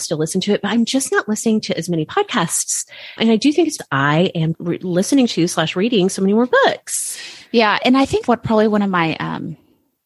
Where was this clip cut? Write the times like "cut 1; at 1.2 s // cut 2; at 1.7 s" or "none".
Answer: cut 1; at 3.2 s // cut 2; at 3.8 s // cut 3; at 4.5 s // cut 4; at 8.3 s